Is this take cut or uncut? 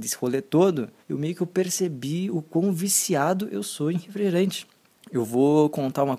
cut